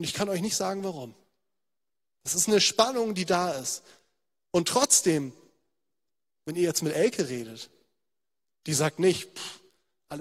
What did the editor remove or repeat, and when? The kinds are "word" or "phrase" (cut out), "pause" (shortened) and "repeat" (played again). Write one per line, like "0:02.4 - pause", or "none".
none